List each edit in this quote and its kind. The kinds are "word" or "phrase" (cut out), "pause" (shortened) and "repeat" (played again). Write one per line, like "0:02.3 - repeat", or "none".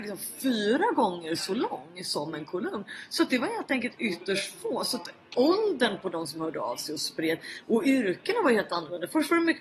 none